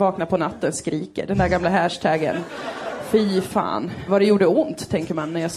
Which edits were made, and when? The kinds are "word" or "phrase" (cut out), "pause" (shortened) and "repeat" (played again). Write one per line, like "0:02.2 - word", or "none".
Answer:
0:04.1 - word